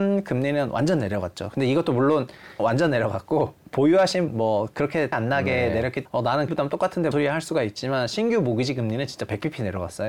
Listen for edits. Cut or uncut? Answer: cut